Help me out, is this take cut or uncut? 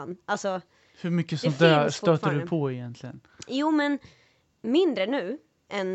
uncut